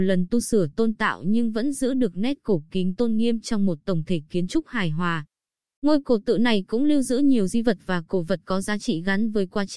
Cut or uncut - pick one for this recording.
uncut